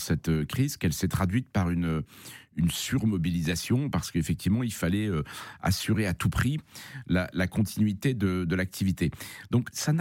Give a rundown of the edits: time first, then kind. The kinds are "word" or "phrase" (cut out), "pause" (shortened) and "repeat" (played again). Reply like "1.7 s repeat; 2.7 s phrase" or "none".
none